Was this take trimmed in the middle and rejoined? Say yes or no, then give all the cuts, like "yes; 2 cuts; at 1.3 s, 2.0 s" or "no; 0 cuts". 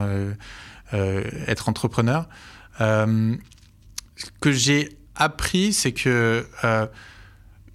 no; 0 cuts